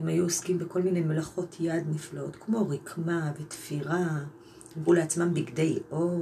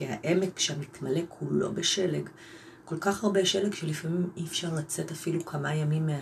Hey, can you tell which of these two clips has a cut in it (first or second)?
first